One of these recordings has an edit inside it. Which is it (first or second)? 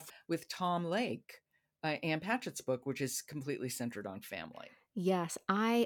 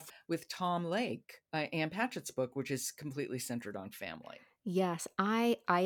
second